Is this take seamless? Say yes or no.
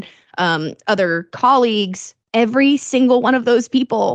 no